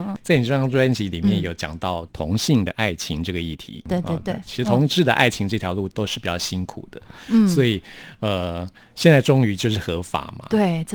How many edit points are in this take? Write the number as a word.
zero